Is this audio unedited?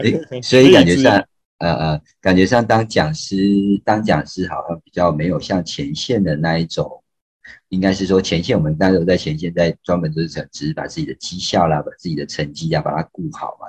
yes; 0 cuts

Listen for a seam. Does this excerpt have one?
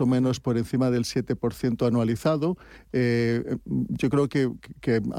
no; 0 cuts

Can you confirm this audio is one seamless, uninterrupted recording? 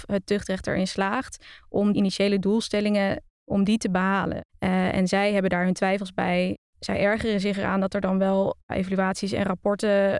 no; 2 cuts; at 1.9 s, 4.5 s

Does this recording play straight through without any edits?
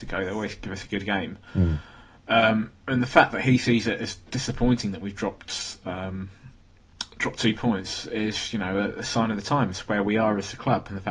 no; 1 cut; at 1.5 s

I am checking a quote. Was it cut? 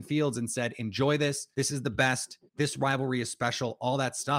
yes; 2 cuts; at 1.5 s, 2.5 s

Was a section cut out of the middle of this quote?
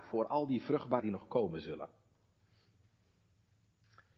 yes; 1 cut; at 1.0 s

